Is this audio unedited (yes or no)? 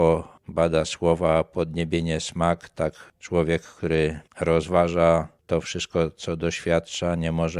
yes